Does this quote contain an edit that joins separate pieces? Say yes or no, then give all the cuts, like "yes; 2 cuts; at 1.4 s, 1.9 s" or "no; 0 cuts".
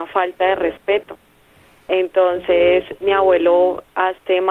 no; 0 cuts